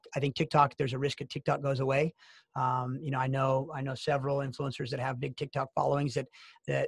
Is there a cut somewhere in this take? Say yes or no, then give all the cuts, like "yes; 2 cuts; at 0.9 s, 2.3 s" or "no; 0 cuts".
no; 0 cuts